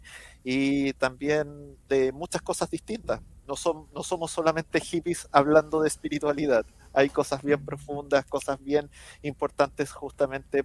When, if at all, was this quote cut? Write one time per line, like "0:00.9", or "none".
none